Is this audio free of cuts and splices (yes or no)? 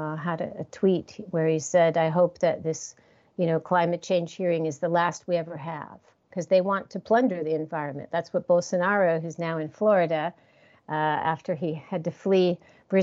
yes